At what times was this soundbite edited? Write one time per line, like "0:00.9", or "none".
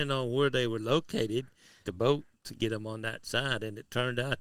0:01.8